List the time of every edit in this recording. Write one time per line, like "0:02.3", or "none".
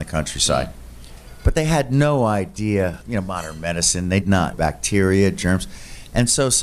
0:03.0
0:04.2
0:04.5